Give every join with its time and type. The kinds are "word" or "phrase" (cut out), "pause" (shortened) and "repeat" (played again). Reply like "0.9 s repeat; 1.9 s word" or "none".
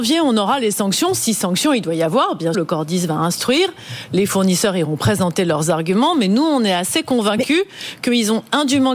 2.5 s word